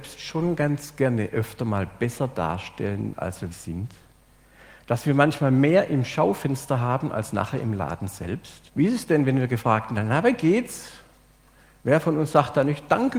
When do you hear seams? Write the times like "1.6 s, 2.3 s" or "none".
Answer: 3.5 s, 8.7 s